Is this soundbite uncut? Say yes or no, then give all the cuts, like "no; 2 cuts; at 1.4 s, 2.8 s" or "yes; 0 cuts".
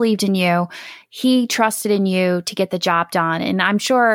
yes; 0 cuts